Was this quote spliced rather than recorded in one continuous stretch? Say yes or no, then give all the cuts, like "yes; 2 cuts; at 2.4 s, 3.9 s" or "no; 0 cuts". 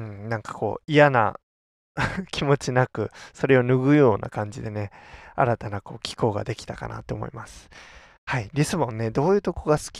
no; 0 cuts